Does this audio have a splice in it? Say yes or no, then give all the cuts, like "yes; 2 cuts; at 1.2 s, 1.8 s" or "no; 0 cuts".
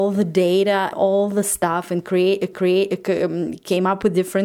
yes; 2 cuts; at 0.9 s, 2.5 s